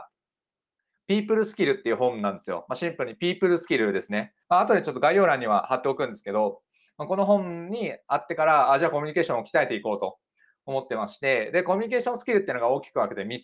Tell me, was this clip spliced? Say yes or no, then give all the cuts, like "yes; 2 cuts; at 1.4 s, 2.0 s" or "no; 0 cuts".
yes; 1 cut; at 4.4 s